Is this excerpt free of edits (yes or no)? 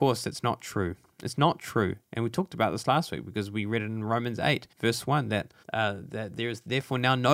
no